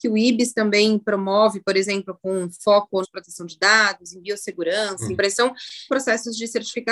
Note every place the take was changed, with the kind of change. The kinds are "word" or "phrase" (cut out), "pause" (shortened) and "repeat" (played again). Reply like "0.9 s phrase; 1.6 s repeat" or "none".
3.0 s phrase; 5.2 s phrase; 5.9 s word